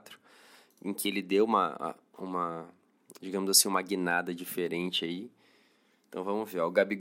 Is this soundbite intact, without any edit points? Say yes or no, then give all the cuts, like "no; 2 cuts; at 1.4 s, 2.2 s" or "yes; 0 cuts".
yes; 0 cuts